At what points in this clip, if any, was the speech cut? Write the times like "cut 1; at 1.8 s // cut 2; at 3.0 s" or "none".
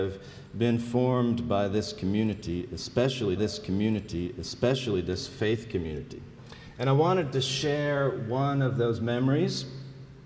cut 1; at 3.4 s